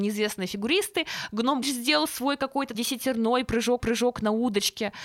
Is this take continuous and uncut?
no; 3 cuts; at 1.6 s, 2.7 s, 3.8 s

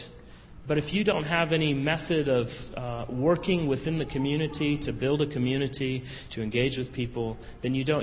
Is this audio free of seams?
yes; 0 cuts

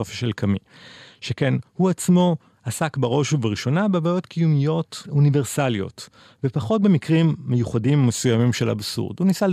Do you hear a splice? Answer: no; 0 cuts

